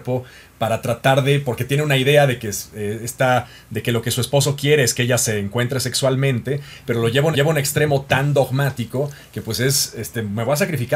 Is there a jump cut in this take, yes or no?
yes